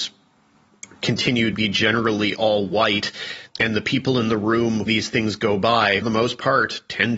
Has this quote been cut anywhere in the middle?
yes; 4 cuts; at 1.5 s, 3.5 s, 4.9 s, 6.0 s

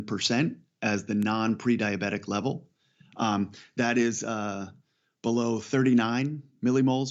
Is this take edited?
no; 0 cuts

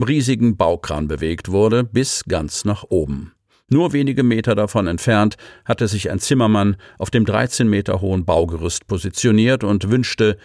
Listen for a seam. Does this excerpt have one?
no; 0 cuts

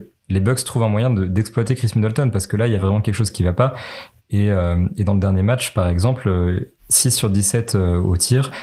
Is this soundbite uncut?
yes; 0 cuts

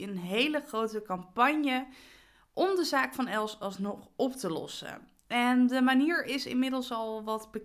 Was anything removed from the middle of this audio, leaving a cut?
no; 0 cuts

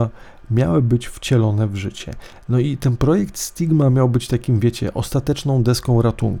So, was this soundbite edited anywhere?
no; 0 cuts

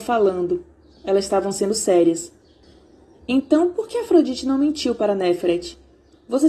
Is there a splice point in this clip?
no; 0 cuts

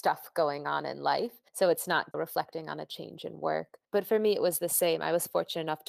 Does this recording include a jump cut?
yes; 3 cuts; at 1.5 s, 2.1 s, 3.8 s

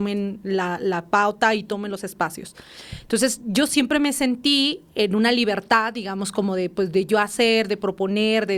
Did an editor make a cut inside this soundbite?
no; 0 cuts

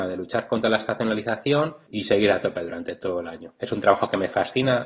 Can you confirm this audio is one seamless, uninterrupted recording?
yes; 0 cuts

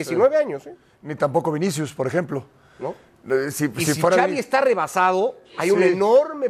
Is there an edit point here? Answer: no; 0 cuts

